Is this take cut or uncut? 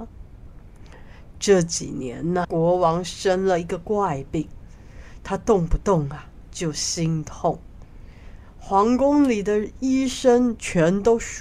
cut